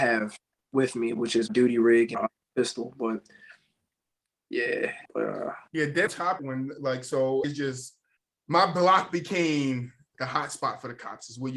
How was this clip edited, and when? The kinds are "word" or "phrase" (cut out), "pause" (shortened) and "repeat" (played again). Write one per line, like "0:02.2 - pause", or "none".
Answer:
0:01.5 - word
0:02.1 - word
0:05.1 - pause
0:06.1 - word
0:06.4 - phrase
0:07.4 - word
0:08.2 - pause
0:10.1 - word